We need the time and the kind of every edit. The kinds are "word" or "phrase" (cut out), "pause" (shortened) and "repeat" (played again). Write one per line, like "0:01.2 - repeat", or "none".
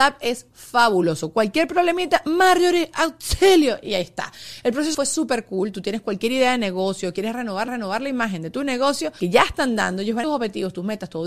0:04.9 - word
0:07.7 - repeat
0:10.2 - phrase